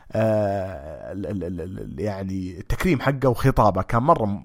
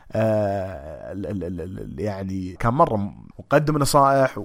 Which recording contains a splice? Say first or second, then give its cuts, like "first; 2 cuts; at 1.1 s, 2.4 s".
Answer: second; 2 cuts; at 2.6 s, 3.3 s